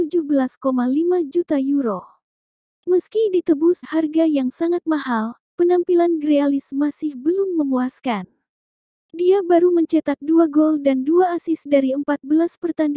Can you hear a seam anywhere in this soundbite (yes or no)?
yes